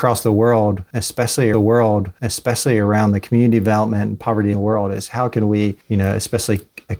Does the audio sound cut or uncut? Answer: cut